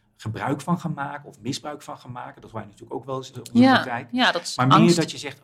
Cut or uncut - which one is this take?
cut